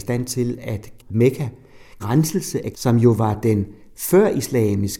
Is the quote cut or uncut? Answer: cut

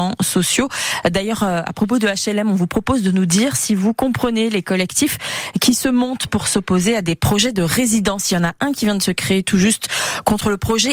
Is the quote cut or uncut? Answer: uncut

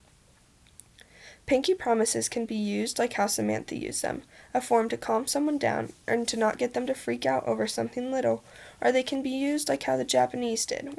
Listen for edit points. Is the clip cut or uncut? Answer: uncut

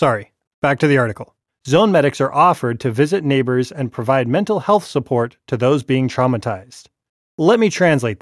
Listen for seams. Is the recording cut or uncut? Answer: cut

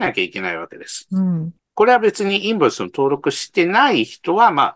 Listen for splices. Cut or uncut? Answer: cut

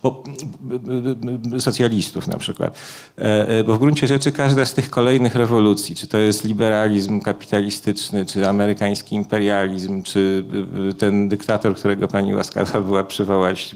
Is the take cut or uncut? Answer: uncut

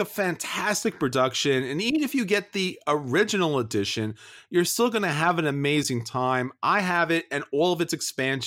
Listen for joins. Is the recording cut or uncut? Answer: uncut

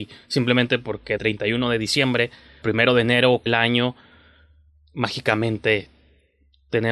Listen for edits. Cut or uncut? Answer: cut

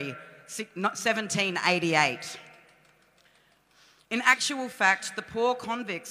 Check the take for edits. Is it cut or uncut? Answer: uncut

